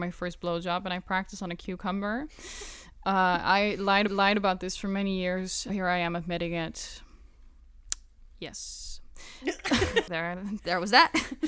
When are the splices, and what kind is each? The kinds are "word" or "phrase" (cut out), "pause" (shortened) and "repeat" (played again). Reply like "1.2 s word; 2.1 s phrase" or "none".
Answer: 4.1 s repeat; 5.7 s word; 10.1 s word